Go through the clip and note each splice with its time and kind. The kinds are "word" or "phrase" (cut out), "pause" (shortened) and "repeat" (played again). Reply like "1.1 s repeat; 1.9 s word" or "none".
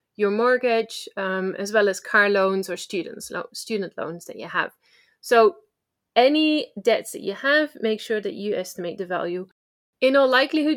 none